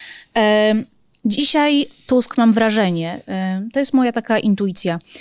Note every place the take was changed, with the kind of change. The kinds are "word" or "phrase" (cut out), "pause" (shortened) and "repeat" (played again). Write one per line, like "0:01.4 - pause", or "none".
none